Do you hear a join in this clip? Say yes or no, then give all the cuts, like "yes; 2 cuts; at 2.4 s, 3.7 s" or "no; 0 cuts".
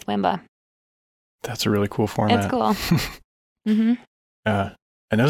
no; 0 cuts